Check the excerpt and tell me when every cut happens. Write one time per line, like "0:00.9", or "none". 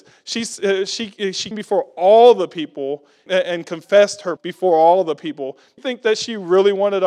0:01.5
0:03.3
0:04.4
0:05.8